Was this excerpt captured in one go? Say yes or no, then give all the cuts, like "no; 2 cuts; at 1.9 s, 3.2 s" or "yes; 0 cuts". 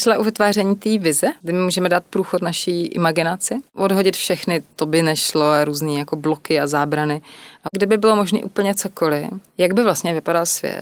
no; 2 cuts; at 1.4 s, 9.5 s